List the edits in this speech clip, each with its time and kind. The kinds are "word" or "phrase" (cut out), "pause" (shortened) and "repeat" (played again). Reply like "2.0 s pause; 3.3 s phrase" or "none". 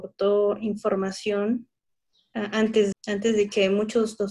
2.9 s word